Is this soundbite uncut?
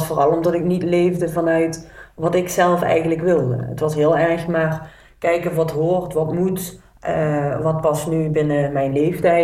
yes; 0 cuts

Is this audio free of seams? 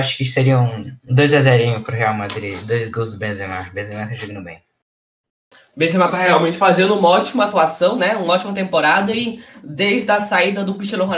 yes; 0 cuts

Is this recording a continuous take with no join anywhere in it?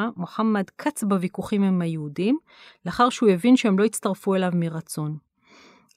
yes; 0 cuts

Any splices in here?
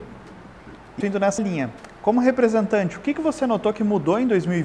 yes; 2 cuts; at 1.0 s, 1.4 s

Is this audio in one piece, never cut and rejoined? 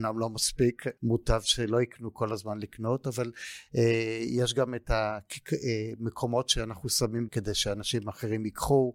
no; 2 cuts; at 1.0 s, 7.3 s

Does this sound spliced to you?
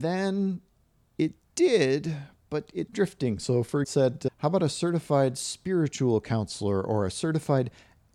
yes; 2 cuts; at 2.9 s, 3.8 s

